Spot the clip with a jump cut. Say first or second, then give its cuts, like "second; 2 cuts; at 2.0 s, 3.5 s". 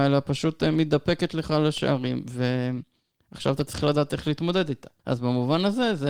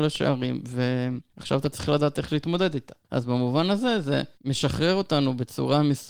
second; 2 cuts; at 1.3 s, 4.3 s